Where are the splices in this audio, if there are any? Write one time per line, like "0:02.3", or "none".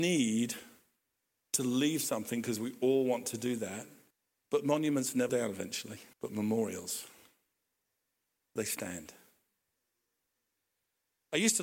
0:04.1
0:05.3
0:06.1

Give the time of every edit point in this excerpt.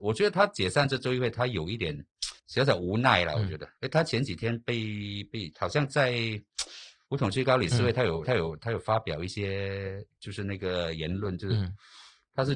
0:02.4
0:03.8
0:08.2

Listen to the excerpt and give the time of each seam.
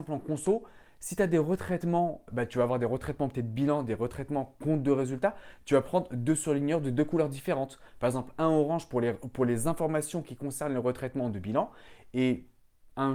0:02.3

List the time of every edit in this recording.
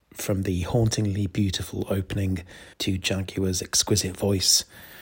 0:02.7

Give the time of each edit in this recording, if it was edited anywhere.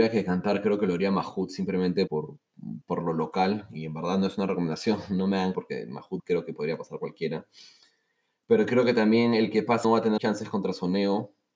0:02.1
0:02.8
0:05.5
0:06.2
0:09.8
0:10.2

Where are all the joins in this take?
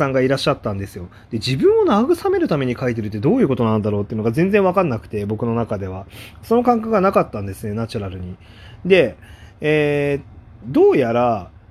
0:10.6

